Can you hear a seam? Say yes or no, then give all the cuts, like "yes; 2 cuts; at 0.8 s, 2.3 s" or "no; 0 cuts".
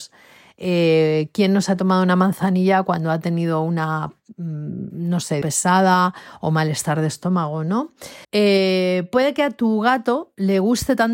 yes; 2 cuts; at 5.4 s, 8.2 s